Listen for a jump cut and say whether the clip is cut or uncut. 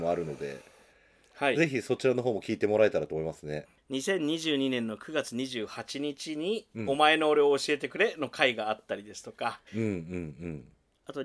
cut